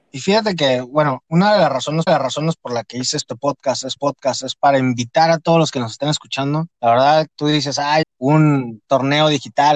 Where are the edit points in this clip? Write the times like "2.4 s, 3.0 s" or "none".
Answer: 2.1 s, 4.0 s, 6.7 s, 7.3 s, 8.0 s